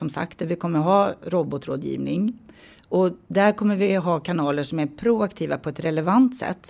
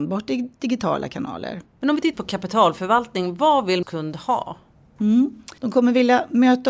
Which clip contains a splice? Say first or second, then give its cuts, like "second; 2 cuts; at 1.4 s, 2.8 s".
second; 4 cuts; at 1.7 s, 2.1 s, 3.8 s, 5.6 s